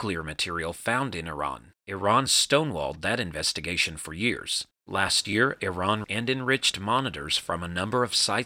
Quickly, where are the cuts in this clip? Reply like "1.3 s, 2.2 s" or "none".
2.3 s, 6.0 s